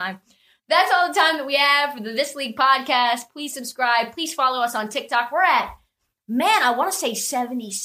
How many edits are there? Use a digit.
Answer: 0